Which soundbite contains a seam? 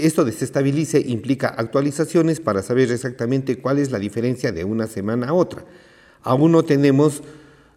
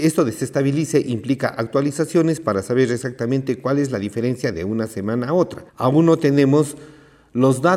second; 1 cut; at 5.7 s

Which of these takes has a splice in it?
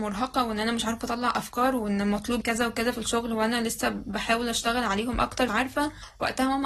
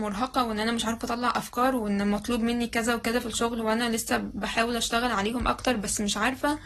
first; 2 cuts; at 2.4 s, 5.5 s

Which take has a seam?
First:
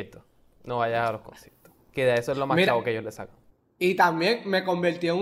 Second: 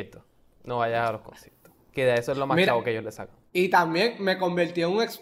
second; 1 cut; at 3.5 s

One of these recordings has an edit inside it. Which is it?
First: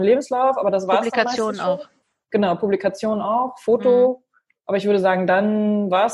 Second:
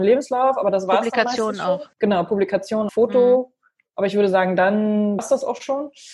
second; 3 cuts; at 1.9 s, 2.9 s, 5.2 s

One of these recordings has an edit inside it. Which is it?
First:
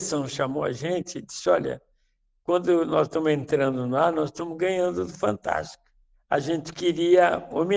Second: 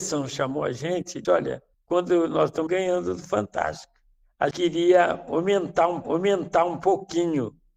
second; 5 cuts; at 1.2 s, 1.7 s, 2.7 s, 4.5 s, 6.0 s

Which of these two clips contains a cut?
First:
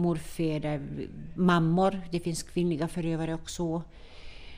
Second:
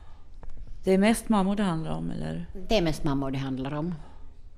first; 1 cut; at 1.3 s

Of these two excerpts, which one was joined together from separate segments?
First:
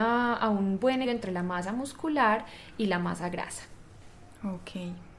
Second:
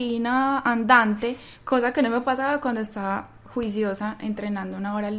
first; 1 cut; at 1.0 s

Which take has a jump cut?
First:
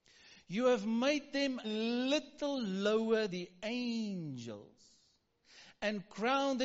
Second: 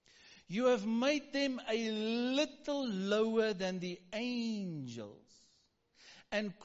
first; 2 cuts; at 1.6 s, 3.3 s

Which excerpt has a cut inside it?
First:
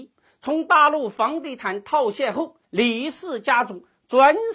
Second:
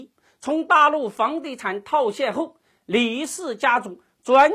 first; 1 cut; at 2.6 s

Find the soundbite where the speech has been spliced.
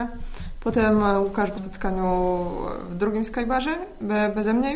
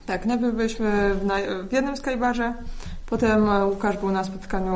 first; 1 cut; at 1.6 s

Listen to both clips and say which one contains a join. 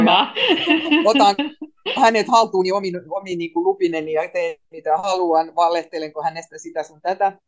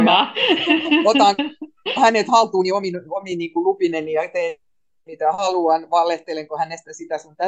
first; 1 cut; at 4.6 s

